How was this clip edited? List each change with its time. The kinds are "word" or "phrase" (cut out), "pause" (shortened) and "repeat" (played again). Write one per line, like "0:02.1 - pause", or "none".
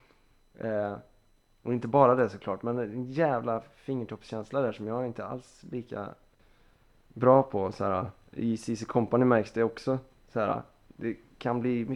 none